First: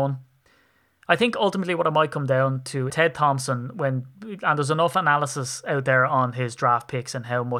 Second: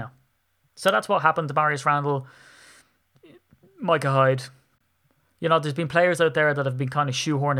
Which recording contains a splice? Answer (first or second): first